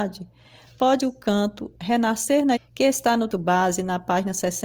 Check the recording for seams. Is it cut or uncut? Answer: cut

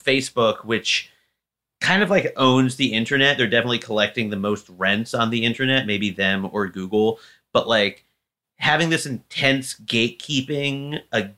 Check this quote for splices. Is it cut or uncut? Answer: uncut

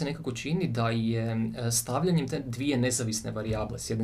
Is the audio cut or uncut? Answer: uncut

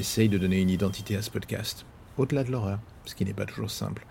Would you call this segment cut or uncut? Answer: uncut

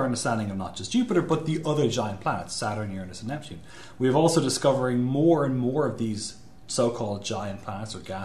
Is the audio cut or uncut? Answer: uncut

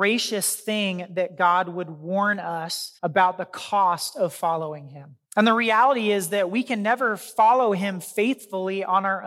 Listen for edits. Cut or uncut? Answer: cut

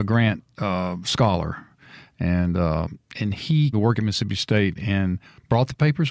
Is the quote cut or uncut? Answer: cut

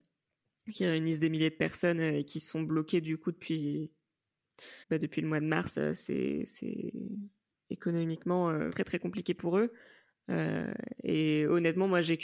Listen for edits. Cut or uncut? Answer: cut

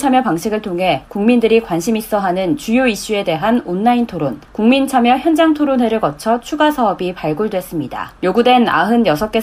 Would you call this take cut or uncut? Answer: cut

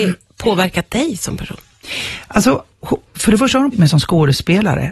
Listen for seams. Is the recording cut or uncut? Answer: cut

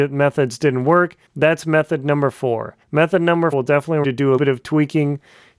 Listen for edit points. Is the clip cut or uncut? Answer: cut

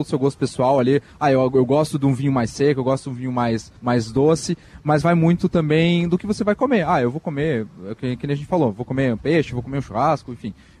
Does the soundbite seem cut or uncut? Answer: cut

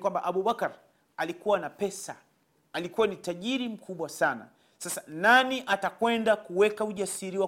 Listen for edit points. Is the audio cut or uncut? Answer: uncut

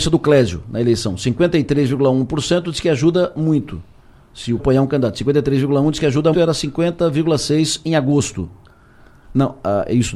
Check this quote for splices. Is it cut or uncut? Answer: cut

